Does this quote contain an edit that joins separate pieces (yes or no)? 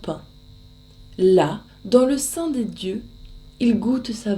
yes